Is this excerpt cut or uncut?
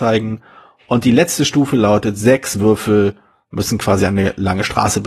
uncut